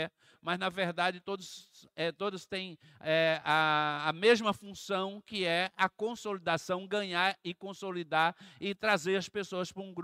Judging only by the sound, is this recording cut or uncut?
uncut